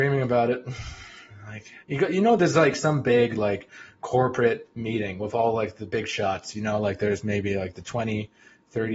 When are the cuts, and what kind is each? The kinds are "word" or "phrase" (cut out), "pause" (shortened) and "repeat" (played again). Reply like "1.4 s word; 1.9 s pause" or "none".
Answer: 1.8 s pause